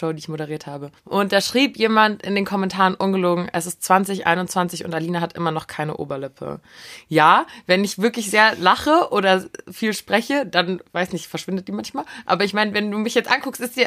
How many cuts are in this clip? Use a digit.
1